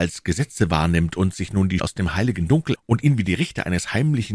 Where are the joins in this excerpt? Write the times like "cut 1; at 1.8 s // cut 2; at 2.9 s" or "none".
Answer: cut 1; at 1.8 s // cut 2; at 2.8 s